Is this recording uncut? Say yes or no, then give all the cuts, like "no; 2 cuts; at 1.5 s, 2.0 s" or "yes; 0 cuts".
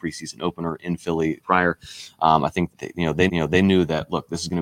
no; 3 cuts; at 1.4 s, 2.7 s, 3.3 s